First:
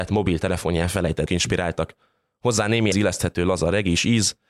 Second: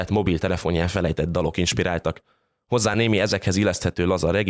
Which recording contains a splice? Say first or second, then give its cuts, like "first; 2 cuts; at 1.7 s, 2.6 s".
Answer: first; 2 cuts; at 1.3 s, 2.9 s